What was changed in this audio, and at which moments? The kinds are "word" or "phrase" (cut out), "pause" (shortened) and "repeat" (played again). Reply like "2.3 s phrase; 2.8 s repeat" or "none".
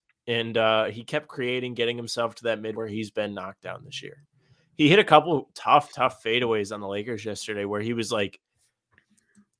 2.7 s word